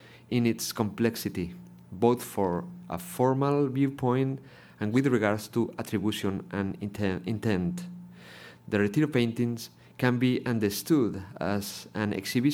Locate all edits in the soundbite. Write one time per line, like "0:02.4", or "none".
none